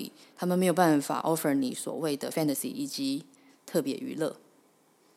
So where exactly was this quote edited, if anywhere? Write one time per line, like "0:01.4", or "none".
none